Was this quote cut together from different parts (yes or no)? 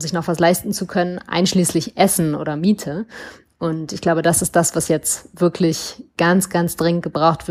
no